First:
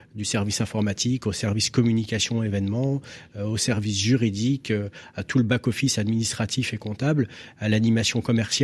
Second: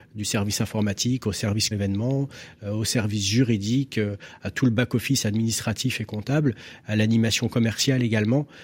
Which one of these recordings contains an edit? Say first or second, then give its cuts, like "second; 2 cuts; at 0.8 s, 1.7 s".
second; 1 cut; at 1.7 s